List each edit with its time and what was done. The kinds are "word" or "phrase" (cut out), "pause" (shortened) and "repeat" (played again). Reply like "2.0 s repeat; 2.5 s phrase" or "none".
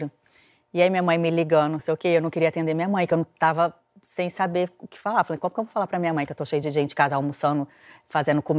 none